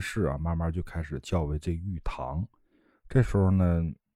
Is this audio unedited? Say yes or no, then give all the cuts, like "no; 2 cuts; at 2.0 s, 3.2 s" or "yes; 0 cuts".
yes; 0 cuts